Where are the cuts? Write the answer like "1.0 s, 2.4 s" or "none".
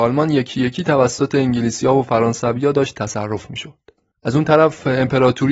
none